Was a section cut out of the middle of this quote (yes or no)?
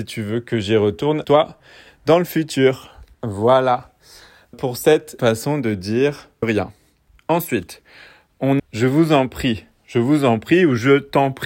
yes